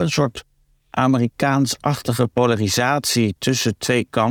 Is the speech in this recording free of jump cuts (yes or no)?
yes